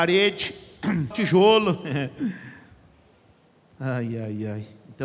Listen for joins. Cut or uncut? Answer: cut